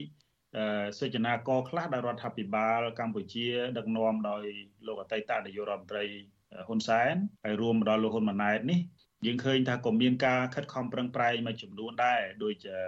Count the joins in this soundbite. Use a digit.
2